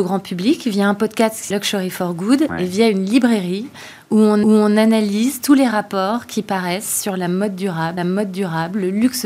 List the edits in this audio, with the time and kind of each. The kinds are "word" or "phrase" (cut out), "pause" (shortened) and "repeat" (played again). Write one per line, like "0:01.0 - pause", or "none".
0:01.5 - word
0:04.4 - repeat
0:08.0 - repeat

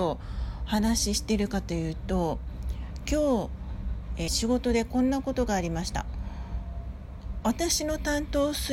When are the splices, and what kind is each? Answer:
0:04.3 - phrase

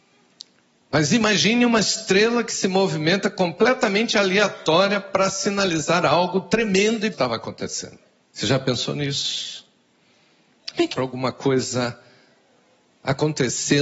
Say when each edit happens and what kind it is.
0:07.1 - word
0:08.2 - pause
0:10.9 - word

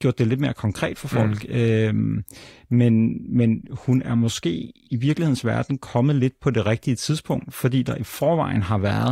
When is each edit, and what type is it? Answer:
none

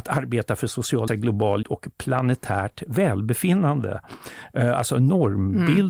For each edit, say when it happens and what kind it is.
0:01.1 - word
0:01.6 - word

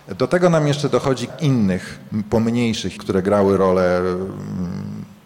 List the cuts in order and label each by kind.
0:01.3 - word
0:03.0 - word

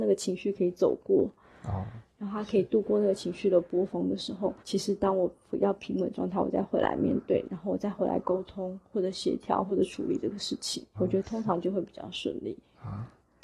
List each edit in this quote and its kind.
0:04.6 - pause
0:10.9 - word

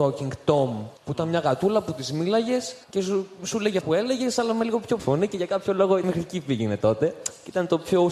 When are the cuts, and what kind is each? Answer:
0:01.0 - pause
0:02.8 - pause
0:03.8 - word
0:05.0 - word
0:06.0 - word

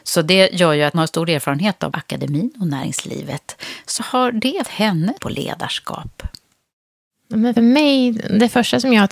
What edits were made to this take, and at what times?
0:00.9 - word
0:01.9 - word
0:04.0 - word
0:04.6 - word
0:05.2 - word
0:07.6 - word

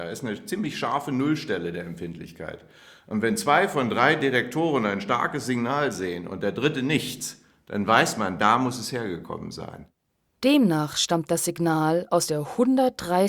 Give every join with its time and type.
none

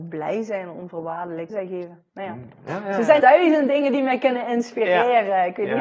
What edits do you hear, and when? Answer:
0:01.5 - word
0:03.2 - word

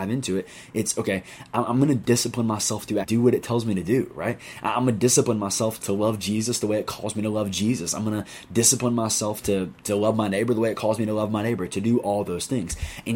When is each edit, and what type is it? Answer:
0:03.0 - word
0:05.8 - word

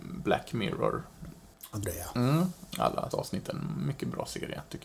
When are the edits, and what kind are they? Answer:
0:01.8 - word
0:03.1 - word

